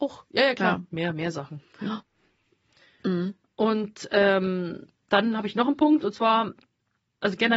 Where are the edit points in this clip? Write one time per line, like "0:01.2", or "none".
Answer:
none

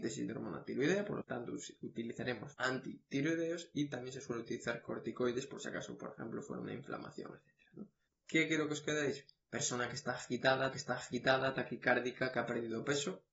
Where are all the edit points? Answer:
0:01.2
0:02.5
0:08.1
0:10.7

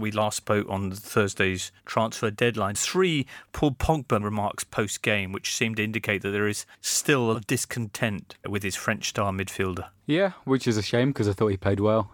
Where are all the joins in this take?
0:01.8
0:02.7
0:04.2
0:06.7
0:07.3
0:08.4

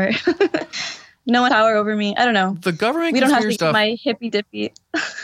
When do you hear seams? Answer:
0:01.5
0:03.5

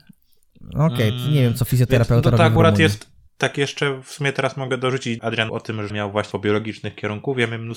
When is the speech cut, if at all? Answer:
0:03.3
0:05.2
0:05.5
0:05.9
0:06.3

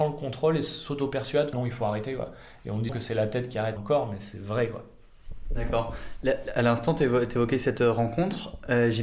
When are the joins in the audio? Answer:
0:01.5
0:02.9
0:03.8

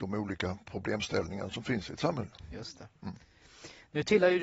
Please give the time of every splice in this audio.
none

